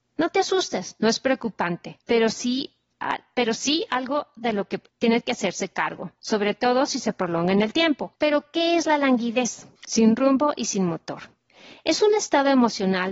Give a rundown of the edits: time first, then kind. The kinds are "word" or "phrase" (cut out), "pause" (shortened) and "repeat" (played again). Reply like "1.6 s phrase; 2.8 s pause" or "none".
2.0 s pause; 4.9 s pause; 8.2 s pause; 9.8 s pause